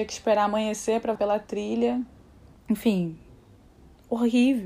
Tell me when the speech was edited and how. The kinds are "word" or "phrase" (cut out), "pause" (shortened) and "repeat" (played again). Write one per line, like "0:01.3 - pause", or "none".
0:01.2 - word